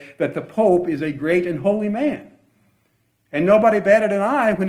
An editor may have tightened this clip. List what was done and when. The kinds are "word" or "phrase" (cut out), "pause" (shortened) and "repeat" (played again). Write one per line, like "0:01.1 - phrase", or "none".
none